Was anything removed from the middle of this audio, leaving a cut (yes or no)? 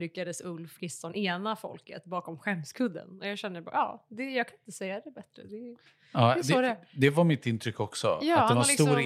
no